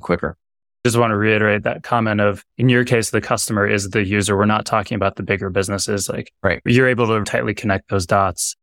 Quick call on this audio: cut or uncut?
cut